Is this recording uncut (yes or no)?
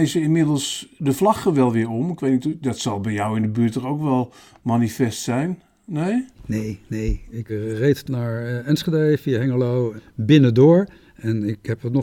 yes